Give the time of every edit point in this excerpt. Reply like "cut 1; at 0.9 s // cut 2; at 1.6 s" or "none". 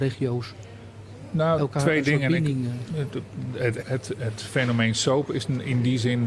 cut 1; at 1.6 s // cut 2; at 3.8 s